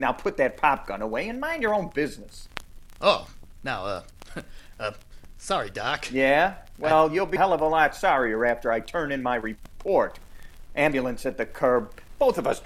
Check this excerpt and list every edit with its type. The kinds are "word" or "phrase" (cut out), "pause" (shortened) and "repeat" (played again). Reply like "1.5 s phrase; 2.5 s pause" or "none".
7.4 s word